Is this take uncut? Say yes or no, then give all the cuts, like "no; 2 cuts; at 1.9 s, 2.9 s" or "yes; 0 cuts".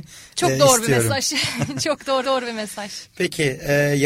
no; 1 cut; at 2.2 s